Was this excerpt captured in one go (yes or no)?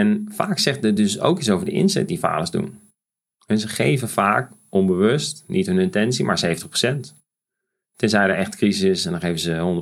yes